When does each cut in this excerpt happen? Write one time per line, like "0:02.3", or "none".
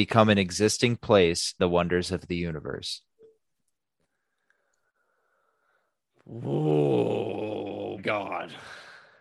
0:01.6
0:08.0